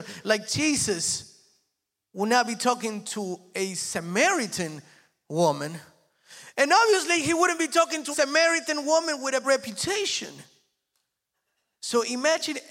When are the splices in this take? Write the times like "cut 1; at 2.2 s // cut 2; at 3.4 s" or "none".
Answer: cut 1; at 8.1 s // cut 2; at 9.4 s